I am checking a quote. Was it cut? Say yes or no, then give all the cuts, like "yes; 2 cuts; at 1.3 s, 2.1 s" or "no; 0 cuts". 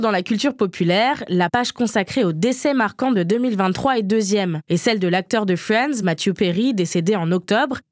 no; 0 cuts